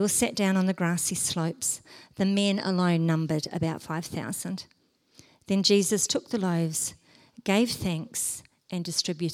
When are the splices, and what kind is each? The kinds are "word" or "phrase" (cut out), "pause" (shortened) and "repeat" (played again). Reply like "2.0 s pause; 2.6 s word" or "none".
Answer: none